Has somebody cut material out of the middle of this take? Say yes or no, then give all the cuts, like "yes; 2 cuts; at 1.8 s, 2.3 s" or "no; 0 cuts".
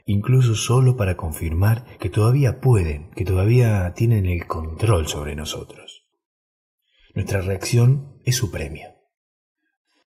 no; 0 cuts